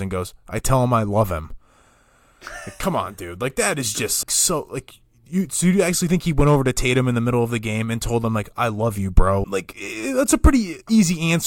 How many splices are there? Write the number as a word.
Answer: two